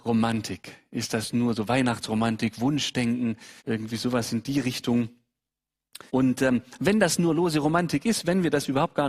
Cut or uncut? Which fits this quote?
cut